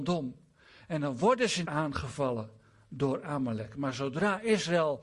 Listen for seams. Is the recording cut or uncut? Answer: cut